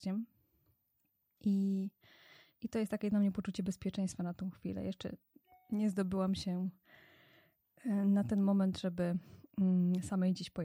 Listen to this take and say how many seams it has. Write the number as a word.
zero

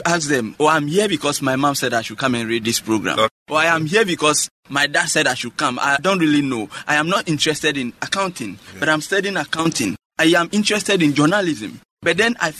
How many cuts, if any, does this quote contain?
zero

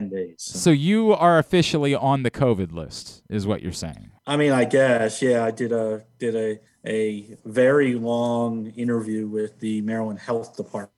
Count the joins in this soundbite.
two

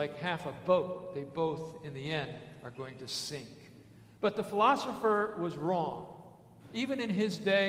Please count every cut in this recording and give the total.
zero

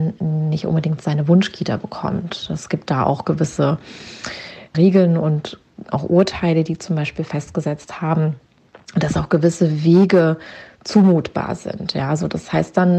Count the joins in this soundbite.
one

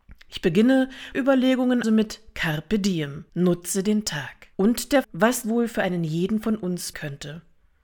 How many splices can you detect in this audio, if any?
seven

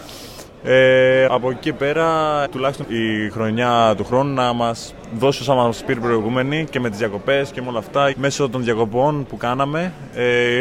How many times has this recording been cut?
four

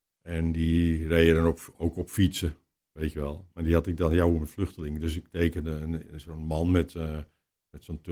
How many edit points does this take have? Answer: zero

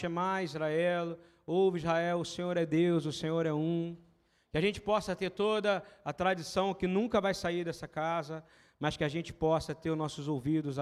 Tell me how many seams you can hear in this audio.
zero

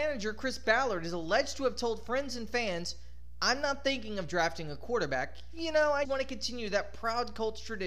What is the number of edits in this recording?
one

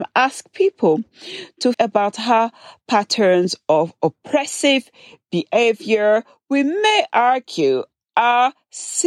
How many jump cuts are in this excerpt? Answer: one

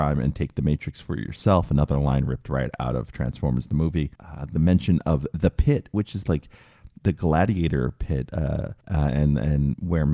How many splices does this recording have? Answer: two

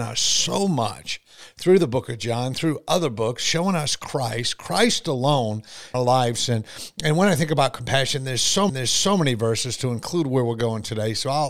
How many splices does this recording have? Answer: two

